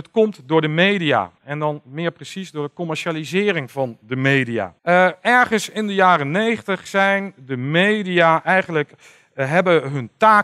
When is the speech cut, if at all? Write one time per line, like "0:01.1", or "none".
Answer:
0:01.4
0:04.8